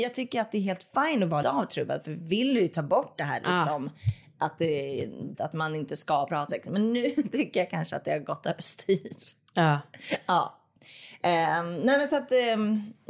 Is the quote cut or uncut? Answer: cut